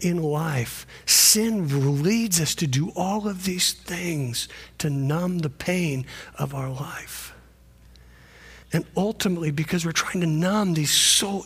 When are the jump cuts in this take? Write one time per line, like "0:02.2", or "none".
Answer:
0:08.6